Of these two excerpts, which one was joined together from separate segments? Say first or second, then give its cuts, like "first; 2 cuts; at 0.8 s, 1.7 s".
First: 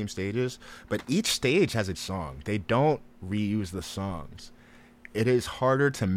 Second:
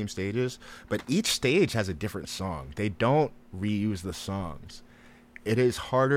first; 1 cut; at 1.9 s